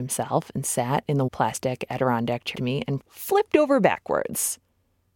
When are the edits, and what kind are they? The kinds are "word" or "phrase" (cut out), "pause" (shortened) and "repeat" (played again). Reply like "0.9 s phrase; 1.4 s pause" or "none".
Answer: 1.3 s word; 2.5 s word; 3.0 s word